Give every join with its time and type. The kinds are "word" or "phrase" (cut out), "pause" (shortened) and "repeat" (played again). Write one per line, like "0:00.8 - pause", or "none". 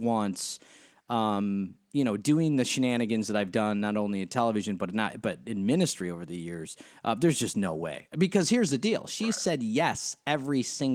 none